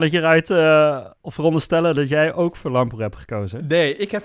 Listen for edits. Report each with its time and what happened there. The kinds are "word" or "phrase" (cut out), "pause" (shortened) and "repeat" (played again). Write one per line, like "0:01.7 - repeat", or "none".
0:01.2 - pause